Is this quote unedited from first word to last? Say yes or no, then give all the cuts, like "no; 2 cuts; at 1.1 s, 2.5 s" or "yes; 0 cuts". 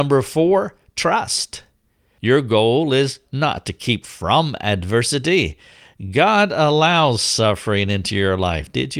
yes; 0 cuts